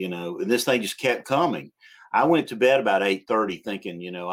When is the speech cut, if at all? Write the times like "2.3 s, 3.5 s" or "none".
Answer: none